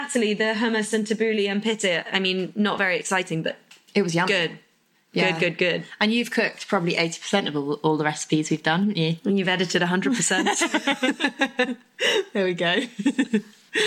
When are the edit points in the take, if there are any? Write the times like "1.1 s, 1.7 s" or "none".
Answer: none